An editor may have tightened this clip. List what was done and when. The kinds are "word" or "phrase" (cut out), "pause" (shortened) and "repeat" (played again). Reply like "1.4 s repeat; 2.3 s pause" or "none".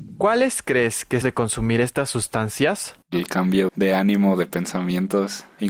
1.2 s phrase; 3.0 s pause; 3.7 s word